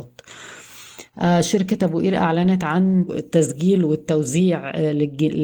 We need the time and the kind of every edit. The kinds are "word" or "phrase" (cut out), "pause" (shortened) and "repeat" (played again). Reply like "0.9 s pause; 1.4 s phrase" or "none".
3.1 s phrase